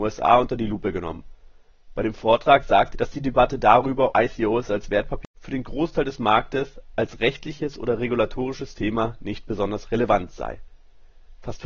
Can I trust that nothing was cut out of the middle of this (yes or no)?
no